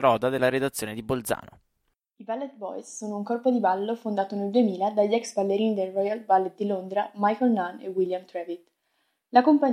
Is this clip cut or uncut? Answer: uncut